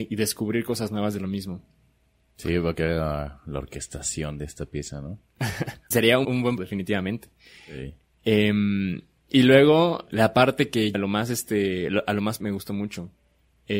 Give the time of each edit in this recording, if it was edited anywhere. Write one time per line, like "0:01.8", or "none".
0:02.7
0:05.9
0:06.2
0:06.6
0:10.1
0:10.9
0:12.4